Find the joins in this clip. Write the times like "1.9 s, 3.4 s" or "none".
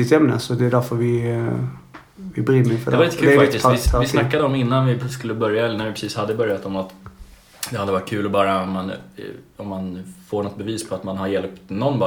none